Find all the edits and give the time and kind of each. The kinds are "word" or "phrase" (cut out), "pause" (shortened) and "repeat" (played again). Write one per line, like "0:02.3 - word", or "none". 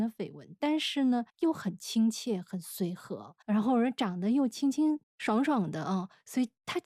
0:01.3 - pause
0:03.4 - pause
0:05.0 - pause